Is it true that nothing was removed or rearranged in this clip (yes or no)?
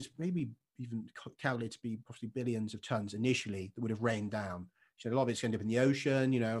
yes